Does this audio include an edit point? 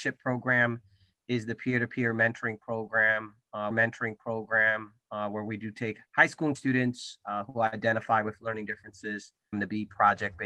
yes; 4 cuts; at 3.7 s, 6.1 s, 6.6 s, 9.5 s

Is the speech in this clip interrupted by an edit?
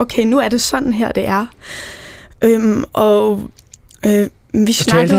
no; 0 cuts

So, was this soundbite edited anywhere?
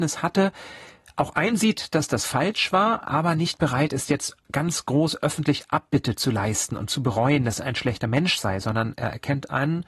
no; 0 cuts

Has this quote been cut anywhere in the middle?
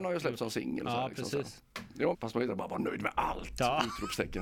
yes; 1 cut; at 2.1 s

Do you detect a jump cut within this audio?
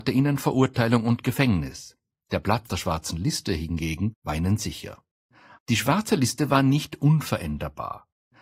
yes; 1 cut; at 2.7 s

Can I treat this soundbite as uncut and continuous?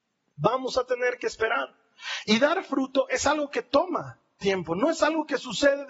yes; 0 cuts

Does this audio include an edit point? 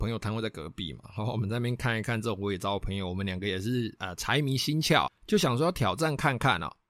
yes; 1 cut; at 5.1 s

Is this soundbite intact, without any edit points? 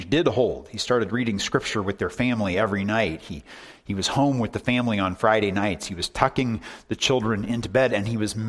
yes; 0 cuts

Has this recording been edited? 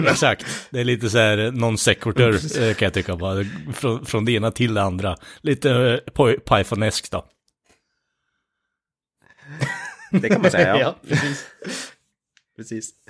no; 0 cuts

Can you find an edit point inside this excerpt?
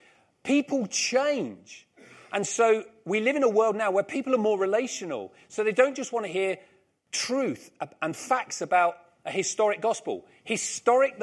no; 0 cuts

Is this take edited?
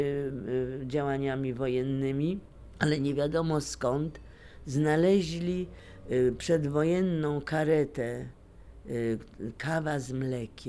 no; 0 cuts

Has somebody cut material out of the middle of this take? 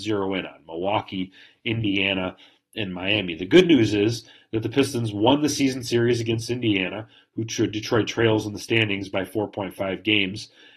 no; 0 cuts

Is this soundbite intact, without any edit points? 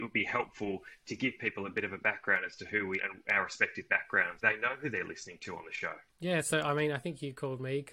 no; 3 cuts; at 3.0 s, 4.4 s, 6.1 s

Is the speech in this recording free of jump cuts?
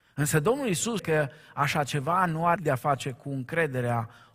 no; 2 cuts; at 1.0 s, 2.6 s

